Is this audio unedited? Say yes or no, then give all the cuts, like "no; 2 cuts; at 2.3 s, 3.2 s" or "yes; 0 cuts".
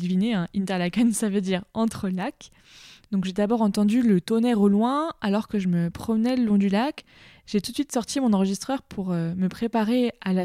yes; 0 cuts